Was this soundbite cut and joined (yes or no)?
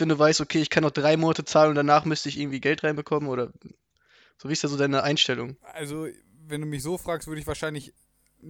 no